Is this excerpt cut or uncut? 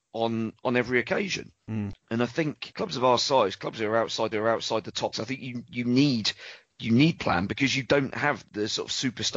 cut